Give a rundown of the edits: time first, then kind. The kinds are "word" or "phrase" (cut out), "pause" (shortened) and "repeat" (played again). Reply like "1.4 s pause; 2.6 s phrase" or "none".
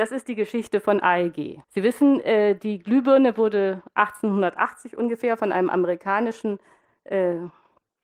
1.6 s pause